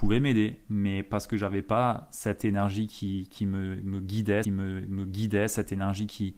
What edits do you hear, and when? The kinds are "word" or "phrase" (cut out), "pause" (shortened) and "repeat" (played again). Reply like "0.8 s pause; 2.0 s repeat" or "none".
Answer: 4.4 s repeat